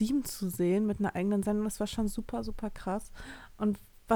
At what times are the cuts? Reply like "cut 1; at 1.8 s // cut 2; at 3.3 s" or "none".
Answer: none